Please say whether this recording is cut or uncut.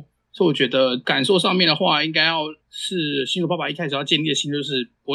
cut